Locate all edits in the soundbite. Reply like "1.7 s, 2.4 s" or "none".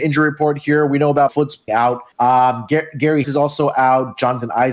1.3 s, 1.7 s, 2.1 s, 3.2 s